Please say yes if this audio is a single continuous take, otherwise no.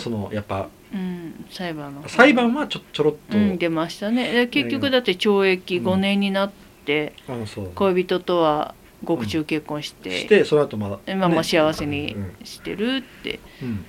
yes